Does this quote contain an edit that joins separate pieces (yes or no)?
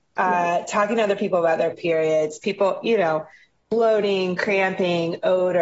no